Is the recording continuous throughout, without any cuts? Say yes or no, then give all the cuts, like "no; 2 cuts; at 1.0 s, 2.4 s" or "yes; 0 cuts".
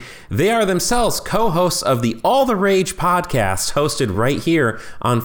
yes; 0 cuts